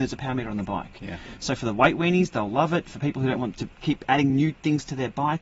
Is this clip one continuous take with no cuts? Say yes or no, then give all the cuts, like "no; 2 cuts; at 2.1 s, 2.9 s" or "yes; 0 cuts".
yes; 0 cuts